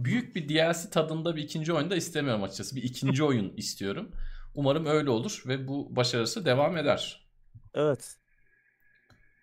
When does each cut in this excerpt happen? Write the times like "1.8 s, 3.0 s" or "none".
7.7 s